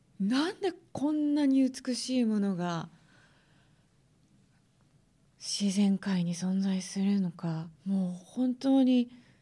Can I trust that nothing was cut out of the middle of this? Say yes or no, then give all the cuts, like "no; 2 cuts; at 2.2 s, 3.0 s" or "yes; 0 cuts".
no; 1 cut; at 7.7 s